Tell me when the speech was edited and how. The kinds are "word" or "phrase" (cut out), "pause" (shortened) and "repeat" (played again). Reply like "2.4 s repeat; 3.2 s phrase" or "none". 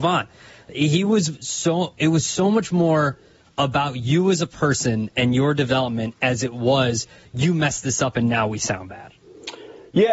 none

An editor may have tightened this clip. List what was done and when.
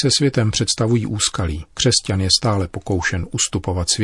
1.7 s pause

